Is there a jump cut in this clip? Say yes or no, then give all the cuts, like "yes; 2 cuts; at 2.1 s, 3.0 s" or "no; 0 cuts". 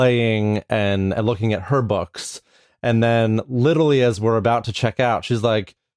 no; 0 cuts